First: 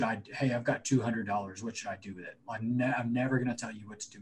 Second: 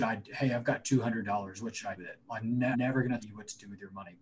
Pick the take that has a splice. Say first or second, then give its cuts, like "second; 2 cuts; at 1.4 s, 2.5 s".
second; 3 cuts; at 2.0 s, 2.7 s, 3.2 s